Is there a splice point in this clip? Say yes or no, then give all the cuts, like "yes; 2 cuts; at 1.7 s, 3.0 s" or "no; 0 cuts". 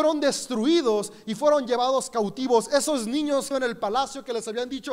yes; 1 cut; at 3.5 s